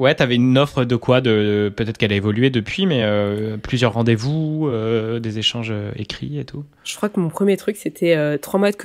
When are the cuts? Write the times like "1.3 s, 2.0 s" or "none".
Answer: none